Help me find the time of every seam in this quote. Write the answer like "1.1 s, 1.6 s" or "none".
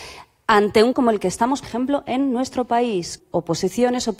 0.9 s, 1.6 s, 3.2 s

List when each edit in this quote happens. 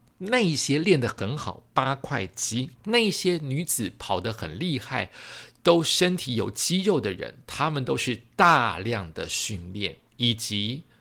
2.8 s

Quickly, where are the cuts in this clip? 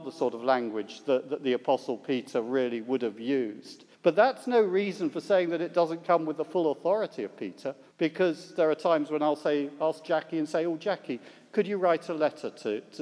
3.9 s, 7.9 s

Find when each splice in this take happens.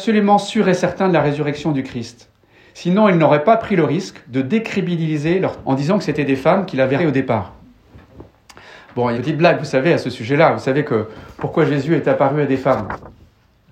5.6 s, 7.0 s, 9.1 s

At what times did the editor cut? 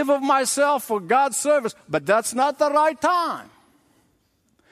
none

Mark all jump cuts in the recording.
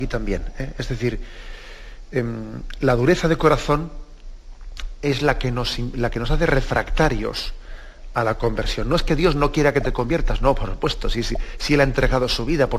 none

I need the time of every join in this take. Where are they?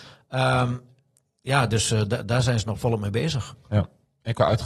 none

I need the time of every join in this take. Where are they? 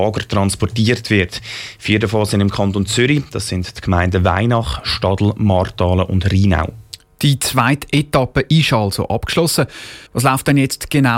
10.1 s

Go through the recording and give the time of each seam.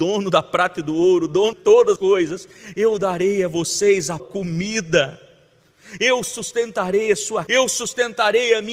1.5 s, 2.0 s, 4.2 s, 7.5 s

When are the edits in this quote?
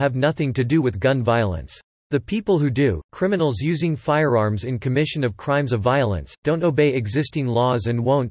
2.0 s

